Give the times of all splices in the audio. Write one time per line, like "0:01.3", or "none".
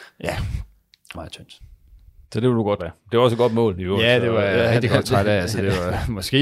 0:01.1
0:02.2
0:02.8